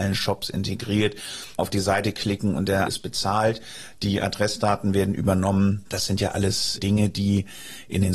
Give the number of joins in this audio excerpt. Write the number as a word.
three